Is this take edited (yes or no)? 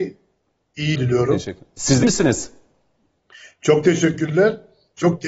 yes